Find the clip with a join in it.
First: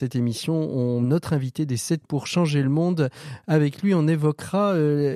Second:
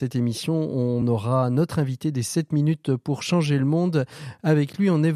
first; 2 cuts; at 1.0 s, 2.0 s

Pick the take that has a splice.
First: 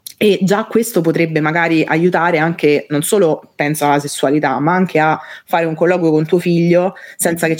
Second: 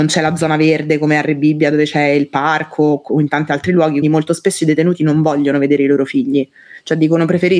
second; 1 cut; at 4.0 s

